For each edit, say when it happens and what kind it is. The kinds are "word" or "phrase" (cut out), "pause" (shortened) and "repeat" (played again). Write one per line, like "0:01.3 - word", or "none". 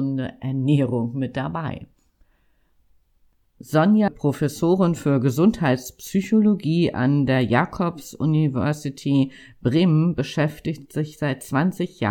0:04.1 - word